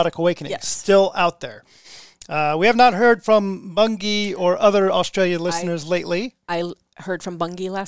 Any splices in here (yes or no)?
no